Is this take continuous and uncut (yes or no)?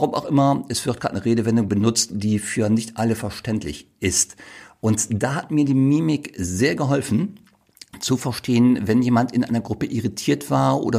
yes